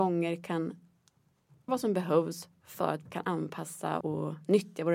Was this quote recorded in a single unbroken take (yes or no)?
no